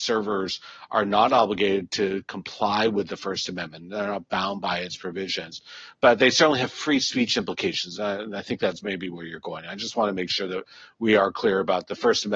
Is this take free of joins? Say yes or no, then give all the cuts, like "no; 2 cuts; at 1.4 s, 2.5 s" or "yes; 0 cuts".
yes; 0 cuts